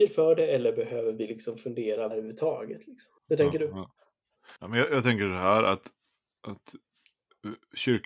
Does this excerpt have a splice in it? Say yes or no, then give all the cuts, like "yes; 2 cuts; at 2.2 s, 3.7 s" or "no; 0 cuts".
yes; 3 cuts; at 2.1 s, 3.2 s, 4.6 s